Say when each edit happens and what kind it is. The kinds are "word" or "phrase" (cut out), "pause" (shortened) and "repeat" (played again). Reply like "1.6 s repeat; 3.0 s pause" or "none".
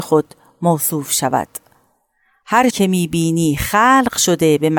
2.7 s word